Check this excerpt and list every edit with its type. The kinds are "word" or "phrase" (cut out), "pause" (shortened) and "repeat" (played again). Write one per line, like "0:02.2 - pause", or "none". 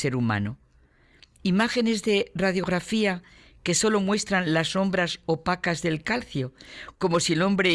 none